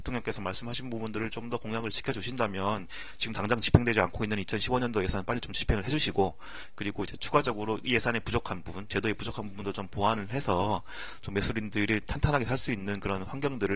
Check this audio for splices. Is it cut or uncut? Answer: uncut